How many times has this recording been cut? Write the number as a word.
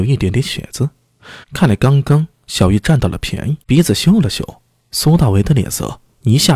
two